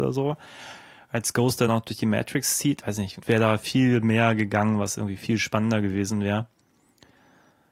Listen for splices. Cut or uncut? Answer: cut